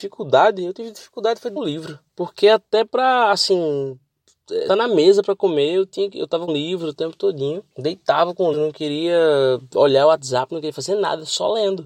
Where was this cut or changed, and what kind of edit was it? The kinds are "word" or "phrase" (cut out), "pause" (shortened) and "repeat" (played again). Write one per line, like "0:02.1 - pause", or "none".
0:01.6 - word
0:02.1 - pause
0:04.7 - word
0:06.5 - word
0:07.0 - phrase
0:07.7 - pause
0:08.5 - word